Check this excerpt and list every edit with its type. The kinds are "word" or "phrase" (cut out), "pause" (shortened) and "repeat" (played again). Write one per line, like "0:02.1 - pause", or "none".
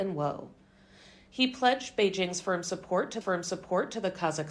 0:03.2 - repeat